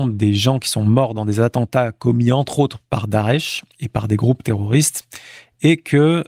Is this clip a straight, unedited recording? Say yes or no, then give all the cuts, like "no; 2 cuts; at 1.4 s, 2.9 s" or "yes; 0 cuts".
no; 1 cut; at 3.7 s